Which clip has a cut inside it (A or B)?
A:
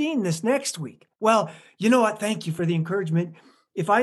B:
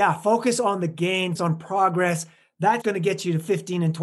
B